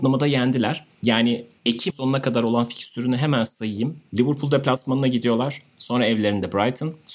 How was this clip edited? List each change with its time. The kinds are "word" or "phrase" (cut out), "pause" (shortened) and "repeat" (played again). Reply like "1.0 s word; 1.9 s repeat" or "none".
1.9 s word